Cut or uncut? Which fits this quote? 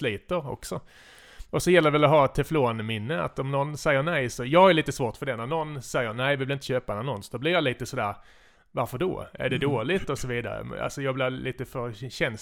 uncut